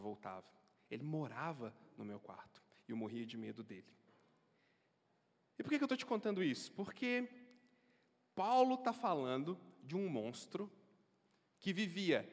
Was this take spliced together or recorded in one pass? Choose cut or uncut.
uncut